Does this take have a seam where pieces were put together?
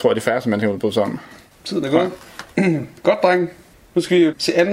yes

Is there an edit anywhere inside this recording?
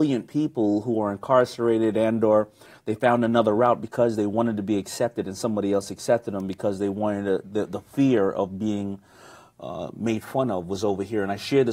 no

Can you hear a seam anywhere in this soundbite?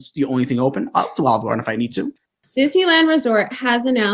no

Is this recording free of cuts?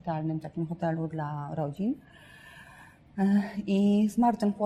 yes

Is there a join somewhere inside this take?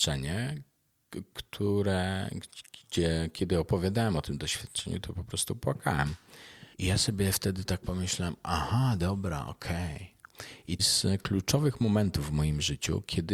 yes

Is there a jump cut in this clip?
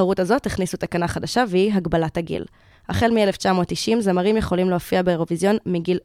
no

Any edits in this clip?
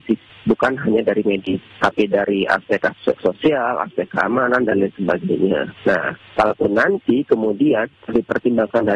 yes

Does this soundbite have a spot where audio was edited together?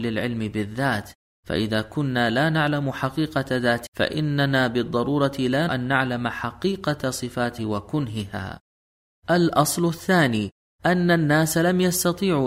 yes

